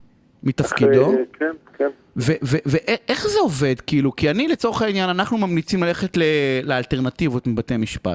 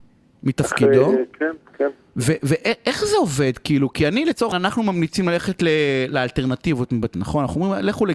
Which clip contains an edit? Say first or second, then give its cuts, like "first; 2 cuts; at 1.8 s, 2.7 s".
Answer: second; 3 cuts; at 2.4 s, 4.5 s, 7.1 s